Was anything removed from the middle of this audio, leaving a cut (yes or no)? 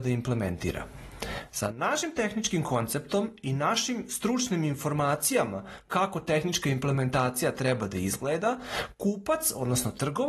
no